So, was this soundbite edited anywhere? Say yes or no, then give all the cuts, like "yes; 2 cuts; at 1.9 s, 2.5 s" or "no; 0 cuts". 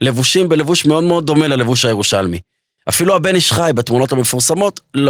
no; 0 cuts